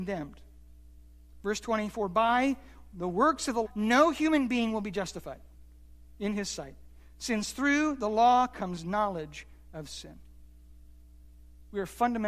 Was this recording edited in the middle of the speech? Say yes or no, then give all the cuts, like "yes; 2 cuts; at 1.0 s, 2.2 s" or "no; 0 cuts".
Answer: yes; 1 cut; at 3.6 s